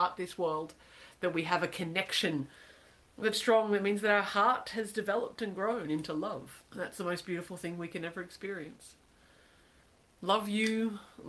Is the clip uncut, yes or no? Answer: no